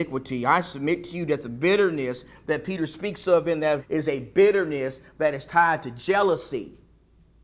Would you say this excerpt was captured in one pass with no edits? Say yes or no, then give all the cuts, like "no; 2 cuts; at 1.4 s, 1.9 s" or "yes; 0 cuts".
no; 1 cut; at 3.8 s